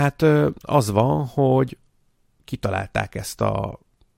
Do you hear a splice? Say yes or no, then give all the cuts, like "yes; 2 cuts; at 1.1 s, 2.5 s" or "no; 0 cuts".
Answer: no; 0 cuts